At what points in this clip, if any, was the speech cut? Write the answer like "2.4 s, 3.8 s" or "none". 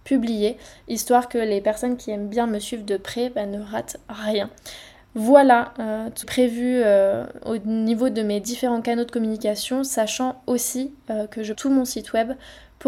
6.2 s, 11.5 s

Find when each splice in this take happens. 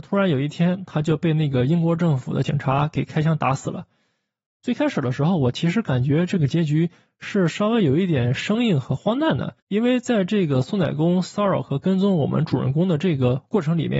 9.6 s

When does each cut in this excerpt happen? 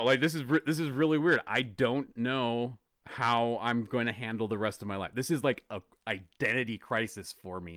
none

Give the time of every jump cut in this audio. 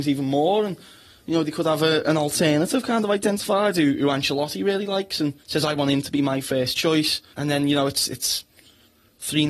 5.4 s, 7.3 s

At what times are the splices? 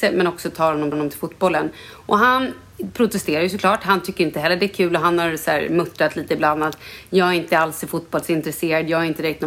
0.9 s

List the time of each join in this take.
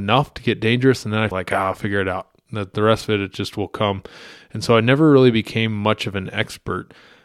1.3 s

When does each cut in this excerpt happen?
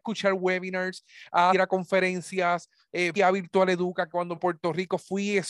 1.5 s, 3.2 s, 4.4 s

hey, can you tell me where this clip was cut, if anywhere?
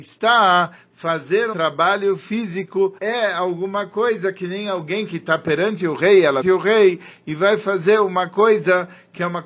1.5 s, 3.0 s, 6.4 s

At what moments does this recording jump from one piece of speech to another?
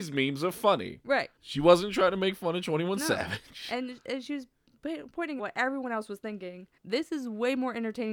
1.4 s, 5.4 s, 6.8 s

